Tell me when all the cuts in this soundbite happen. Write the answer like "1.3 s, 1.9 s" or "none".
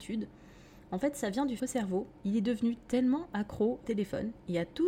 1.6 s, 3.8 s